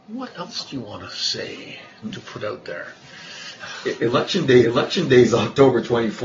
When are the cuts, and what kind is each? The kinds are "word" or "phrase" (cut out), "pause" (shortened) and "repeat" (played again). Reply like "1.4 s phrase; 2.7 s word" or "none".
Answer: 4.6 s repeat

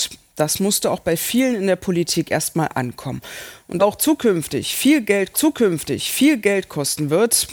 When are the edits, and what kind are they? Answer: 3.8 s phrase; 5.3 s repeat

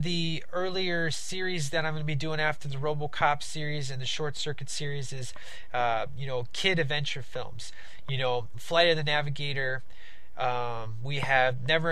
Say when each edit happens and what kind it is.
8.5 s word

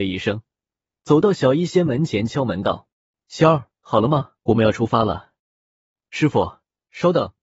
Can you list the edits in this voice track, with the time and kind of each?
2.9 s pause; 3.8 s pause; 4.4 s pause; 5.4 s pause

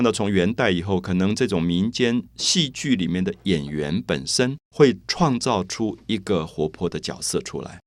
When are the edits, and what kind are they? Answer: 2.3 s pause; 4.7 s pause

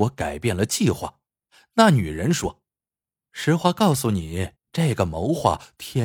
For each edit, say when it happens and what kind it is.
1.3 s pause; 2.7 s pause; 4.6 s pause

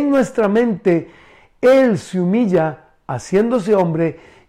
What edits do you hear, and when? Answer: none

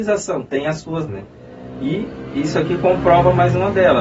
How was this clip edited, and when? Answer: 1.1 s phrase

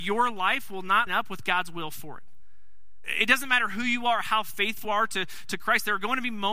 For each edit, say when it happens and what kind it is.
1.1 s word; 4.8 s word

